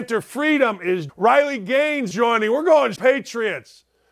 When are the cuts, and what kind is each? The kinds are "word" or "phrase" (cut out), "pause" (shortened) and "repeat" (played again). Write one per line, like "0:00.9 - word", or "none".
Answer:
0:01.1 - word
0:02.1 - word
0:03.0 - word